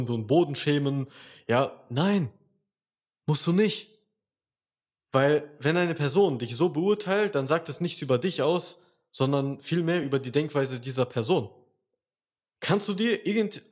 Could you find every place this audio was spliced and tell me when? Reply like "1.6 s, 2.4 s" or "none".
none

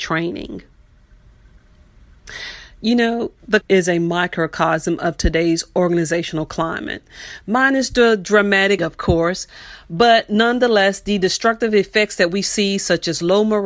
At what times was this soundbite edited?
3.6 s, 8.8 s

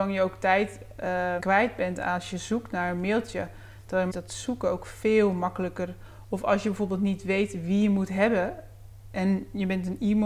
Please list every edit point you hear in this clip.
1.4 s, 4.1 s

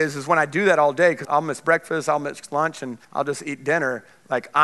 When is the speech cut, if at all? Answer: 1.2 s, 3.0 s

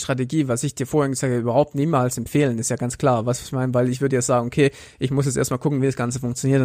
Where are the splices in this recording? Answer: none

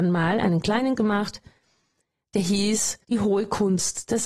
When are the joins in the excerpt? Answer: 1.0 s, 3.0 s

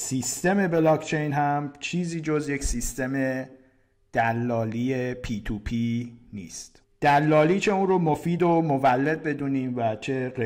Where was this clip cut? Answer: none

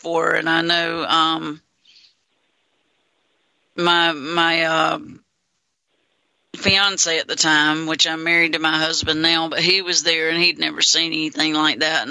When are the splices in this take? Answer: none

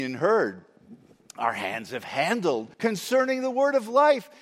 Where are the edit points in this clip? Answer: 2.7 s

